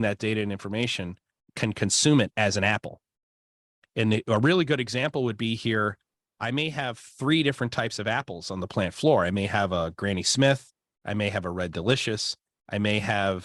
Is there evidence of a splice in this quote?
no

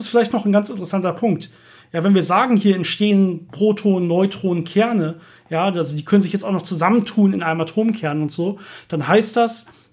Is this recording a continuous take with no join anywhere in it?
yes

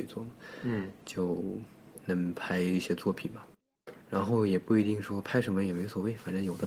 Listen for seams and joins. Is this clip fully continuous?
no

